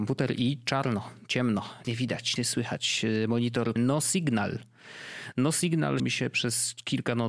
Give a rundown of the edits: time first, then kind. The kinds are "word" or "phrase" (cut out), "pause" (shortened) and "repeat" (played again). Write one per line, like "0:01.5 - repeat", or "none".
0:01.8 - word
0:02.4 - word
0:03.8 - word
0:06.0 - word